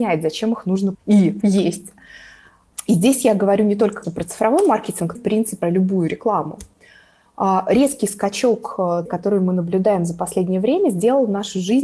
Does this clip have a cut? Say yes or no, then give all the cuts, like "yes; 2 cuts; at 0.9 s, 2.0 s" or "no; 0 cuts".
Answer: yes; 6 cuts; at 0.9 s, 1.4 s, 4.0 s, 5.2 s, 5.6 s, 9.1 s